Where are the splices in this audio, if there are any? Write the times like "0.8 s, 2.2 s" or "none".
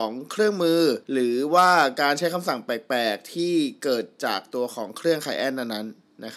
1.0 s